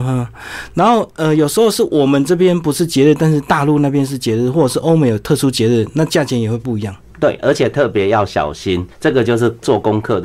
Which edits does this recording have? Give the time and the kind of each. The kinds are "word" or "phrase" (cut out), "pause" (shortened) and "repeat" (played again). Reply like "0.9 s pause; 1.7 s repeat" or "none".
8.9 s pause